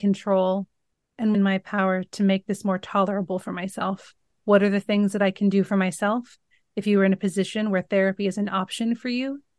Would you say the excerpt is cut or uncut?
cut